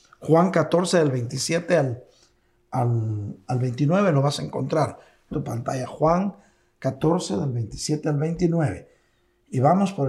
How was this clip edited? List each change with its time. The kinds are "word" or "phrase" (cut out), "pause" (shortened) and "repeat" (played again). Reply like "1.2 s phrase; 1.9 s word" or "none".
5.3 s phrase